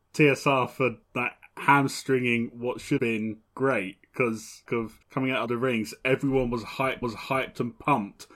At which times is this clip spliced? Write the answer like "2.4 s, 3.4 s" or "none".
1.0 s, 3.0 s, 3.5 s, 4.7 s, 5.0 s, 5.5 s, 7.0 s